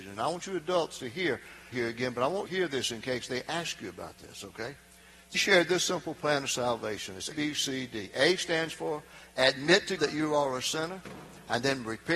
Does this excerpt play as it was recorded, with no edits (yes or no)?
no